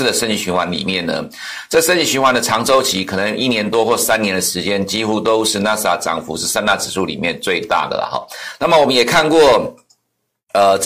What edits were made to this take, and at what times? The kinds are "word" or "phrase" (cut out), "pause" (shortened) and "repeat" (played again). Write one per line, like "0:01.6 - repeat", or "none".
none